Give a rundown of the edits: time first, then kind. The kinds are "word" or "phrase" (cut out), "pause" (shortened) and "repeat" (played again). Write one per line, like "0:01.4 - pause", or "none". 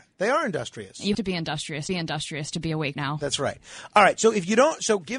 0:01.1 - word
0:01.9 - repeat
0:02.9 - word